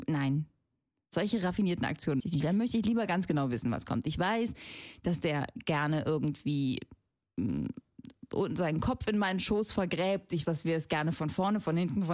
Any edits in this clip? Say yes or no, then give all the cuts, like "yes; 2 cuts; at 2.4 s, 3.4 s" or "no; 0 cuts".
yes; 2 cuts; at 2.2 s, 10.4 s